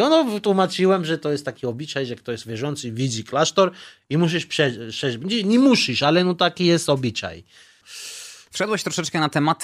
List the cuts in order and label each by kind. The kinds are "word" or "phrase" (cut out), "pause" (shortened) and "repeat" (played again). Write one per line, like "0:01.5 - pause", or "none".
none